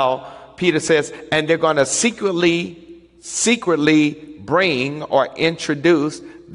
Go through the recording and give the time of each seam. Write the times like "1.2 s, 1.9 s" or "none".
none

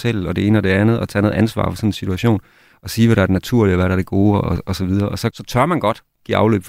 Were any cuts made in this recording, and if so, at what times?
5.3 s

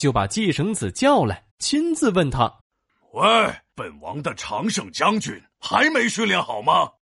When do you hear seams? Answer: 1.5 s, 2.6 s, 3.7 s

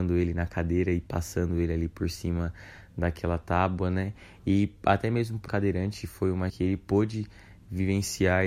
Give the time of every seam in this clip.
5.5 s, 6.5 s

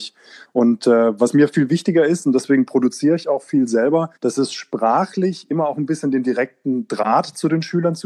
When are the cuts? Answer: 4.2 s

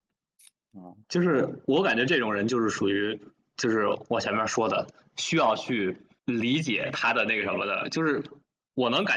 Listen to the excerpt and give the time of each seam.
1.0 s, 6.2 s

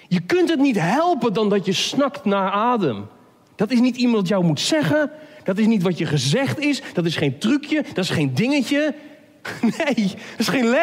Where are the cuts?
none

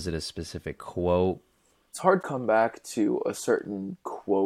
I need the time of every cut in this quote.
2.2 s

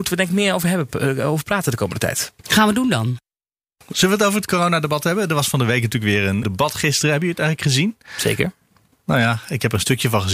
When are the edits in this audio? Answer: 6.4 s

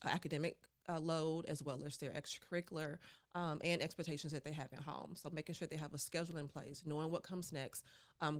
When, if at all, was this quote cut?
none

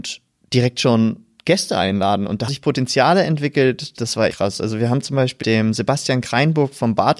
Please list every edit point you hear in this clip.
2.5 s, 4.3 s, 5.4 s

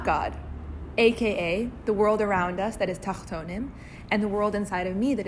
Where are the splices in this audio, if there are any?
none

